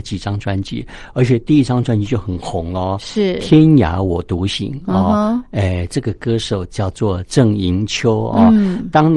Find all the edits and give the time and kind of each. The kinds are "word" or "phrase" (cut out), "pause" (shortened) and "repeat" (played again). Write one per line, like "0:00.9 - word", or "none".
none